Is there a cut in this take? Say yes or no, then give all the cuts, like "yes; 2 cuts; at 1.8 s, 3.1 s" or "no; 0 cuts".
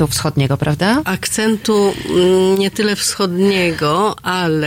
no; 0 cuts